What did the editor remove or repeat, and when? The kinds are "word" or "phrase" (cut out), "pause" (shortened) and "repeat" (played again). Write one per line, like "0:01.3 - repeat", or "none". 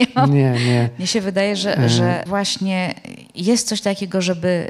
0:02.3 - word